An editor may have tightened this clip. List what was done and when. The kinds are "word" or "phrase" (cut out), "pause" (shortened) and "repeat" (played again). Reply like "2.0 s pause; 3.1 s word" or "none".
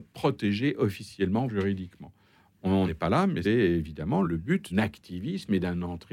1.5 s word; 2.9 s word; 3.4 s word; 4.2 s word; 4.7 s word